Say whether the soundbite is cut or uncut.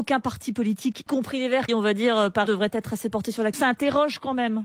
cut